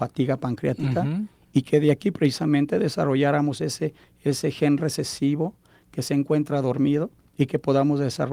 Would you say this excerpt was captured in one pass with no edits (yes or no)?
yes